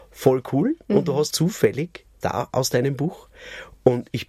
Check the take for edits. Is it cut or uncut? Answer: cut